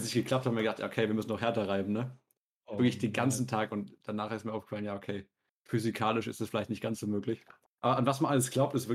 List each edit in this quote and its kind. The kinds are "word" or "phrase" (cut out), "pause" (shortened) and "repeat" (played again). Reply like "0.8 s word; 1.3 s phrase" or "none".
none